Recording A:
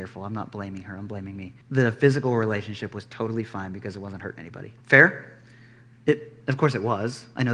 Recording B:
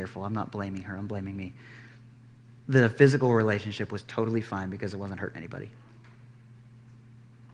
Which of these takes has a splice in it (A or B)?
A